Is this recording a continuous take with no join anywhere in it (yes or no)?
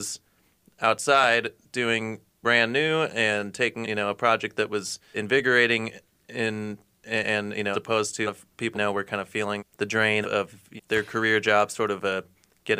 no